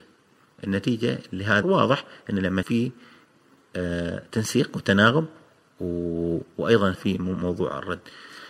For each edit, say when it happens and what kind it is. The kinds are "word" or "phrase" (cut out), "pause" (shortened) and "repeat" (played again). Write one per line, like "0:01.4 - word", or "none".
0:01.6 - word
0:02.6 - word
0:06.9 - word